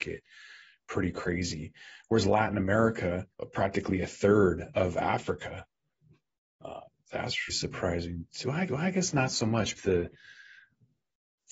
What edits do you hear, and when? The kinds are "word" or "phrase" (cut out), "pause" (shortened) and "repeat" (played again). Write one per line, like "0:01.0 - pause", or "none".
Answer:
0:03.3 - pause
0:07.5 - word
0:08.7 - repeat
0:09.8 - phrase